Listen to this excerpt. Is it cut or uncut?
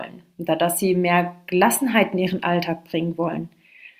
uncut